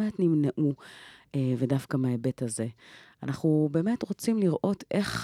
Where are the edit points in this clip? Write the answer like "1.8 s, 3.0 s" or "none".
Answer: none